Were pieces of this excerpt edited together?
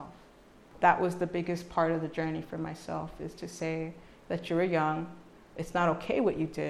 no; 0 cuts

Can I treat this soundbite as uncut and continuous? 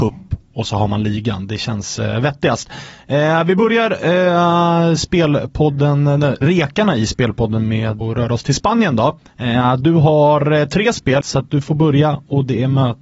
no; 4 cuts; at 6.4 s, 8.0 s, 9.3 s, 11.2 s

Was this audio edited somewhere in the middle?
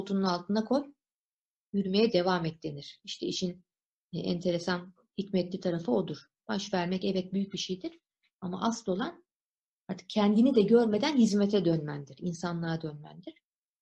no; 0 cuts

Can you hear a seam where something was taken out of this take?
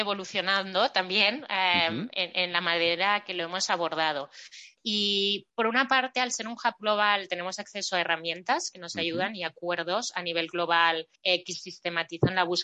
yes; 2 cuts; at 5.5 s, 11.2 s

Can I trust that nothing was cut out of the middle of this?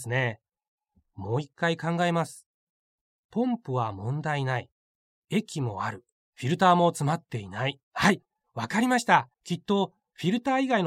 no; 3 cuts; at 6.1 s, 7.8 s, 9.3 s

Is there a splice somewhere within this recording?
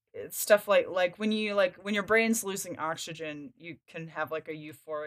no; 0 cuts

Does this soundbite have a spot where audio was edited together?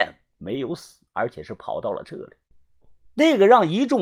yes; 2 cuts; at 1.1 s, 3.1 s

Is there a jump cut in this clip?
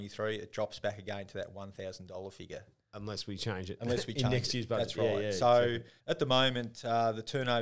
yes; 1 cut; at 6.0 s

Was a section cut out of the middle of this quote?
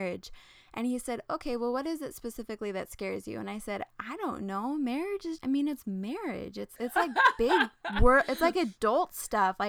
yes; 2 cuts; at 5.4 s, 6.8 s

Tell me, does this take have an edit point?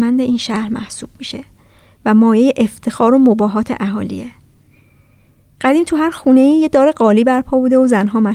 no; 0 cuts

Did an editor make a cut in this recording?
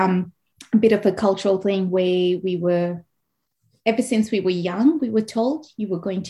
no; 0 cuts

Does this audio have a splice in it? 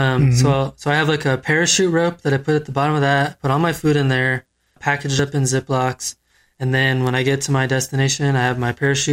yes; 1 cut; at 4.8 s

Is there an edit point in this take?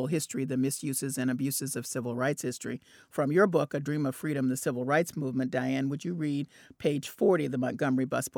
no; 0 cuts

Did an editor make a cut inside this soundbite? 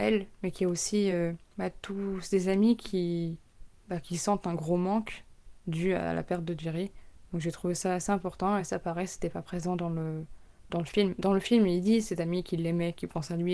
no; 0 cuts

